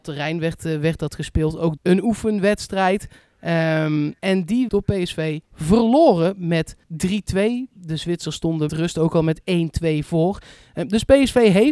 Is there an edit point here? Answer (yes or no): yes